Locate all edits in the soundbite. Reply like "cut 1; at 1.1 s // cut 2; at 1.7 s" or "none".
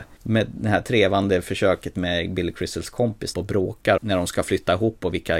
cut 1; at 3.3 s // cut 2; at 4.0 s